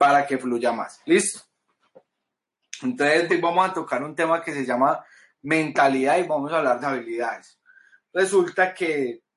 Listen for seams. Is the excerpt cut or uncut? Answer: cut